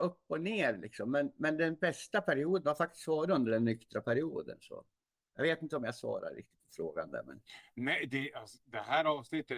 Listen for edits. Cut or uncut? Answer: uncut